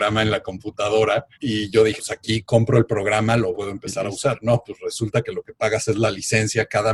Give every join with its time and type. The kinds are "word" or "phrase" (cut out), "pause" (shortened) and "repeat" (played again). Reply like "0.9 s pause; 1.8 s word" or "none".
1.3 s pause; 2.0 s word; 3.5 s phrase